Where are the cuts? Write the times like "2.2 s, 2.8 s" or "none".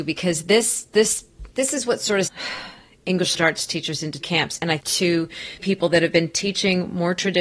1.5 s, 2.3 s, 3.3 s, 4.2 s, 4.8 s, 5.6 s